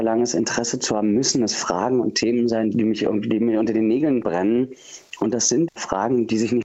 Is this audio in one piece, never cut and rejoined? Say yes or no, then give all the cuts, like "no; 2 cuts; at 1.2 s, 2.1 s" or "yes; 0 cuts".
no; 1 cut; at 5.7 s